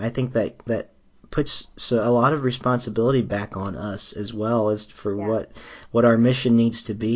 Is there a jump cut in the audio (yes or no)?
no